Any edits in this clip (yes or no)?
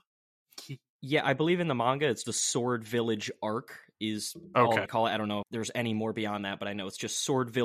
yes